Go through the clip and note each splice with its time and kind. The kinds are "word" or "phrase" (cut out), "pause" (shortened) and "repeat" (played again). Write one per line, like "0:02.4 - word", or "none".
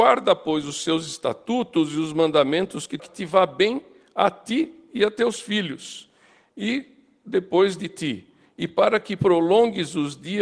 0:03.0 - phrase